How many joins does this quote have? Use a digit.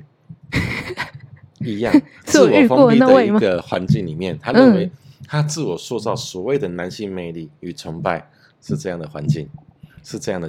0